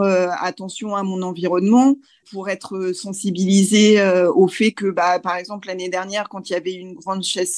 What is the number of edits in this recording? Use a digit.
1